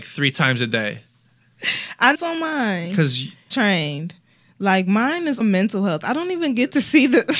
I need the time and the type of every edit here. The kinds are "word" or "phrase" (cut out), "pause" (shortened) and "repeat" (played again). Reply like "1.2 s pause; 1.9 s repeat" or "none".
2.1 s phrase; 3.5 s word; 5.4 s word